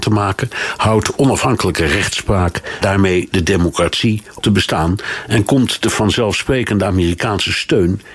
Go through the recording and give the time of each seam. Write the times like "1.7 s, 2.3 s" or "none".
2.8 s, 4.4 s